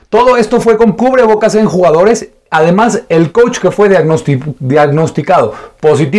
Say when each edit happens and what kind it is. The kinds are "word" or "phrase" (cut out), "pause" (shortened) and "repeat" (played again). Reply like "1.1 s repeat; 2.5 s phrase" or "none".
1.0 s phrase